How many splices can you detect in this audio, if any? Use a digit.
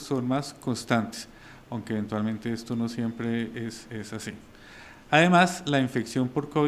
0